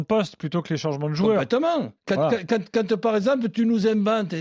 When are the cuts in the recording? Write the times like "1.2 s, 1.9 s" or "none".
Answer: 2.0 s